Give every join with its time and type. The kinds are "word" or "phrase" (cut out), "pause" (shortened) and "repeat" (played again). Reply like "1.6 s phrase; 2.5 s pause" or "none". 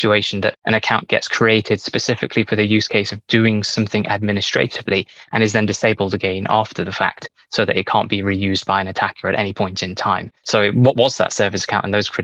10.4 s pause